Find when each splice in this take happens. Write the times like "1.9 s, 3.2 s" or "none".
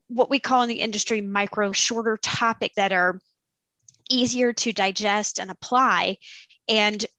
1.7 s, 2.7 s